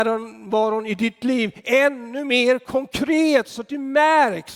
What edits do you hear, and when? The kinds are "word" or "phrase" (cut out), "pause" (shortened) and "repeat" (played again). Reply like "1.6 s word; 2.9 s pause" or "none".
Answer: none